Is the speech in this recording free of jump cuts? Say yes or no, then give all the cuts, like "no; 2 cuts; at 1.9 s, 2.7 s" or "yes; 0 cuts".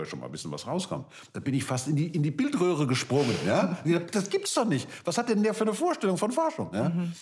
yes; 0 cuts